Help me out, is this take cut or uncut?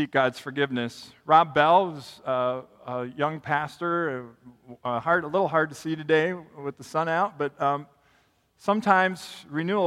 uncut